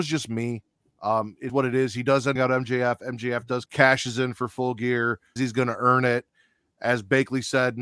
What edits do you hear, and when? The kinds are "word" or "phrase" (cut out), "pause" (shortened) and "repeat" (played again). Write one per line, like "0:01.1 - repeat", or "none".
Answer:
0:01.5 - word
0:02.4 - phrase
0:03.7 - phrase
0:05.4 - word